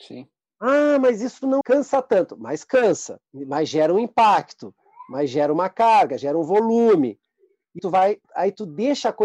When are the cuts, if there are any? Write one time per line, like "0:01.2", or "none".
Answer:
0:01.6
0:03.3
0:07.8
0:08.2